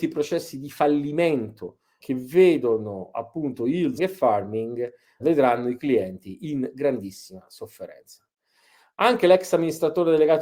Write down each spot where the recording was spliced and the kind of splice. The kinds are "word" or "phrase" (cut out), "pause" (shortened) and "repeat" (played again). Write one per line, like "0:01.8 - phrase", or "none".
0:02.0 - word
0:04.0 - word
0:05.2 - word